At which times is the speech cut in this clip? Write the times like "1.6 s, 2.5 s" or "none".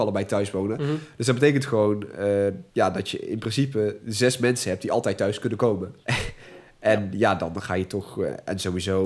2.7 s, 6.0 s